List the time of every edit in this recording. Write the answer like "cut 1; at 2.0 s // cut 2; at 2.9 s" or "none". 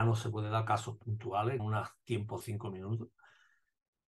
cut 1; at 1.6 s // cut 2; at 2.4 s

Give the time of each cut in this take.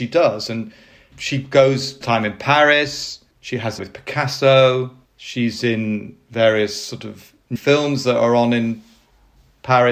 cut 1; at 1.1 s // cut 2; at 2.0 s // cut 3; at 3.3 s // cut 4; at 3.8 s // cut 5; at 5.0 s // cut 6; at 7.6 s

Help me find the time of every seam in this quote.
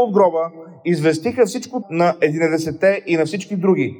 cut 1; at 1.8 s

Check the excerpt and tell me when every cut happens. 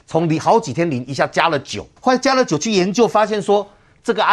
cut 1; at 2.0 s

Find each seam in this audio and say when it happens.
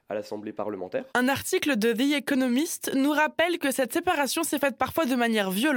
cut 1; at 1.1 s

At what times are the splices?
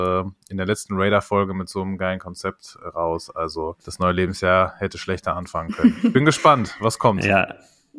cut 1; at 3.8 s

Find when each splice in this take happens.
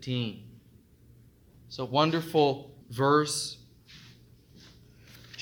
cut 1; at 2.8 s

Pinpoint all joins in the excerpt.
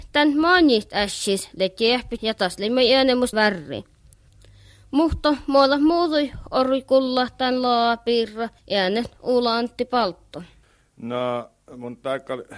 cut 1; at 2.2 s // cut 2; at 3.3 s // cut 3; at 8.6 s

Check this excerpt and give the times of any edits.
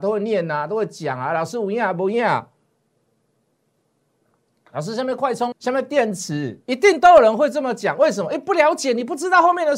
cut 1; at 5.5 s

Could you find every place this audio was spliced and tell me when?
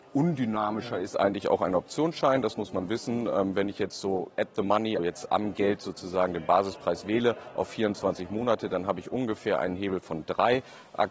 cut 1; at 5.0 s

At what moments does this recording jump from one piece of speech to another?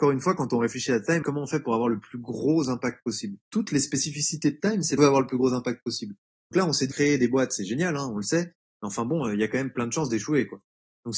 cut 1; at 1.2 s // cut 2; at 3.4 s // cut 3; at 5.0 s // cut 4; at 6.5 s // cut 5; at 6.9 s

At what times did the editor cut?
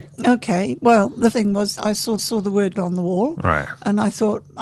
cut 1; at 1.3 s // cut 2; at 1.8 s // cut 3; at 2.2 s // cut 4; at 2.7 s

